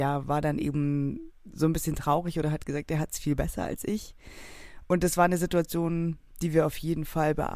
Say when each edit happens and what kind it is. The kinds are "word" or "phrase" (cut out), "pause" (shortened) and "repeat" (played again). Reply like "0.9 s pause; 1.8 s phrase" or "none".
none